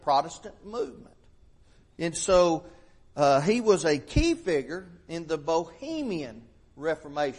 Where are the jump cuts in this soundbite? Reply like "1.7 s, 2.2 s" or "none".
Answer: none